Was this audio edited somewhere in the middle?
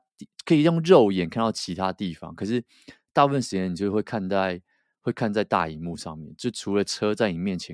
no; 0 cuts

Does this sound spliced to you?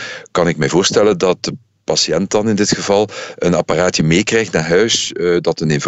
no; 0 cuts

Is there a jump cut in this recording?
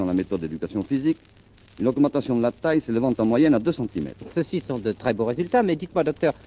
no; 0 cuts

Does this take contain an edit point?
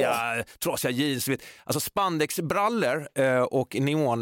no; 0 cuts

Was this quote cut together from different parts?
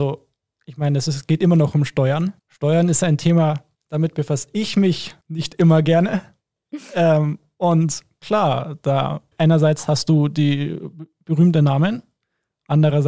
yes; 4 cuts; at 2.4 s, 3.7 s, 5.2 s, 9.3 s

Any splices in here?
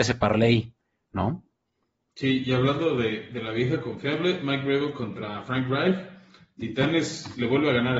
no; 0 cuts

